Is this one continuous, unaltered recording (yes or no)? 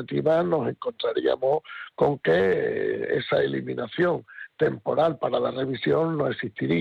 yes